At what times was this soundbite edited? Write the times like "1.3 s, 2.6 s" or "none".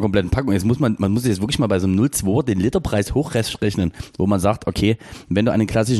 none